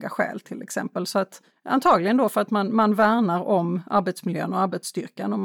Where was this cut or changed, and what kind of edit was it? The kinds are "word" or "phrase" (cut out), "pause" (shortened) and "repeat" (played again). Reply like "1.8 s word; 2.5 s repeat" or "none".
1.5 s pause